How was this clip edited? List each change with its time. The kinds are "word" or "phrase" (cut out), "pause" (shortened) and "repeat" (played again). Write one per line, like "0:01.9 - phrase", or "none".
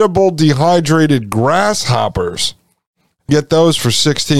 0:03.3 - word